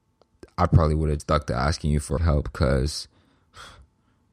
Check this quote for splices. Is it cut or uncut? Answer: cut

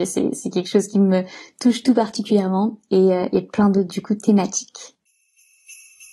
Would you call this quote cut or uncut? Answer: uncut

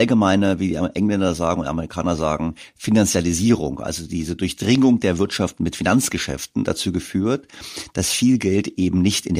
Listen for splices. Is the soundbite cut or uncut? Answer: uncut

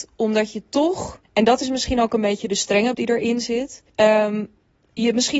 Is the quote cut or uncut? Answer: cut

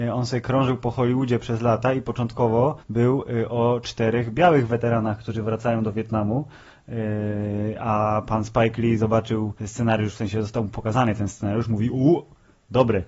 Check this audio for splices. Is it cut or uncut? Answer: cut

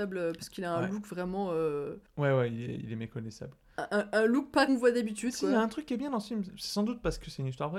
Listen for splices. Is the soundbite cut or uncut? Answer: cut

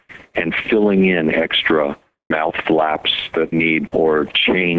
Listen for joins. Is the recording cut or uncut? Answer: cut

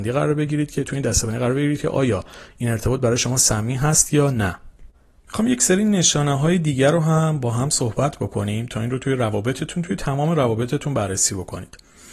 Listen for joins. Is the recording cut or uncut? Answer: uncut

